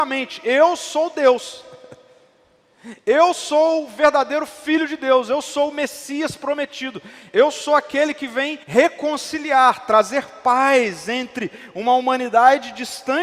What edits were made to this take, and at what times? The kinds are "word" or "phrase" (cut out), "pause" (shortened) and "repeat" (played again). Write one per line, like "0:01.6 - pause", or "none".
0:08.6 - pause